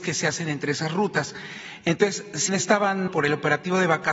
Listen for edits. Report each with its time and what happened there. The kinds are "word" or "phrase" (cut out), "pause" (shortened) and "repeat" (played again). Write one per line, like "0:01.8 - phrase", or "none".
0:02.5 - word
0:03.1 - word